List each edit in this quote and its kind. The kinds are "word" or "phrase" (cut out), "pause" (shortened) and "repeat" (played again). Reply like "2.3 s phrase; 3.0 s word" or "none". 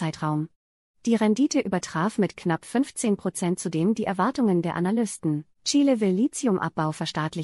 5.5 s pause